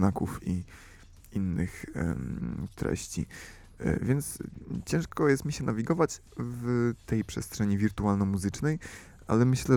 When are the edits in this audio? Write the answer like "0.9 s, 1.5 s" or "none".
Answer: 6.3 s

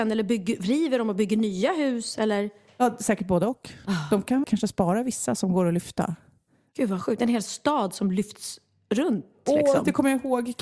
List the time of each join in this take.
4.4 s

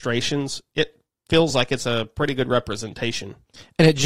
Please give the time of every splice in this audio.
none

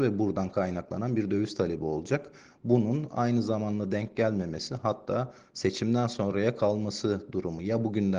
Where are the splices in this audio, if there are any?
none

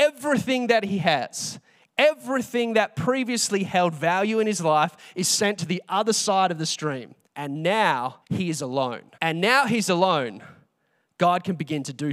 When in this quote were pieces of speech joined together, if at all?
7.2 s, 8.2 s, 9.1 s

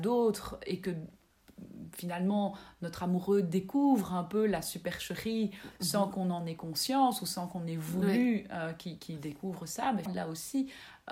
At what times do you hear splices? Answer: 10.1 s

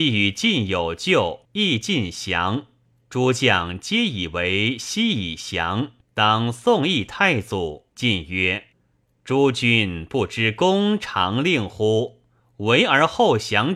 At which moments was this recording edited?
1.4 s, 2.9 s, 6.0 s, 7.9 s, 8.7 s, 12.4 s

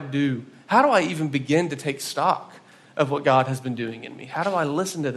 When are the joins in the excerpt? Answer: none

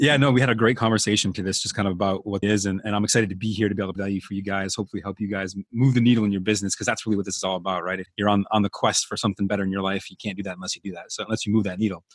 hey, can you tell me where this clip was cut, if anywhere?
1.3 s, 2.4 s, 4.0 s, 8.1 s, 11.3 s

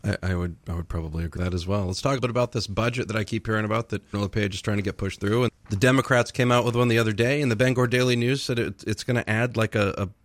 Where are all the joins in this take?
1.4 s, 2.2 s, 4.1 s, 5.5 s

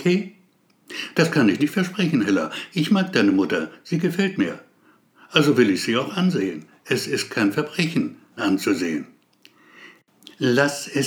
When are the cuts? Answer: 1.6 s, 8.4 s

